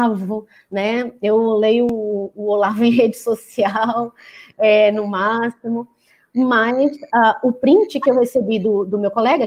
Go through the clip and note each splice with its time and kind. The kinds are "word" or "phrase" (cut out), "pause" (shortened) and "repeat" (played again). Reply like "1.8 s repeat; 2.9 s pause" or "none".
none